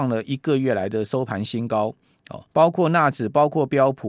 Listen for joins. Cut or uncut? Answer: cut